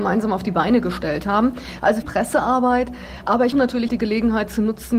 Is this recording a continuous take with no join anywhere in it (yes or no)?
no